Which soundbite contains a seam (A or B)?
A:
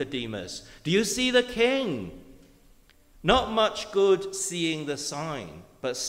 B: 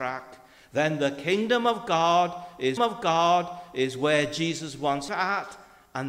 B